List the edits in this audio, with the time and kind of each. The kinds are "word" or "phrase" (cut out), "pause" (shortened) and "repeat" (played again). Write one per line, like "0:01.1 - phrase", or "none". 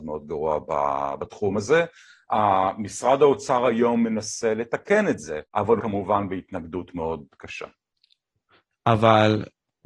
0:05.5 - pause
0:05.8 - word